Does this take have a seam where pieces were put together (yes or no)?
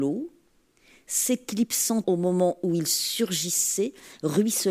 yes